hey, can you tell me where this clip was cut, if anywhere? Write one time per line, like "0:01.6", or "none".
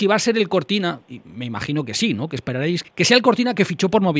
0:02.8